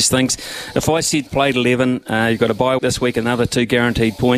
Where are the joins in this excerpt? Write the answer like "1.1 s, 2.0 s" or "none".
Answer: 1.3 s, 2.8 s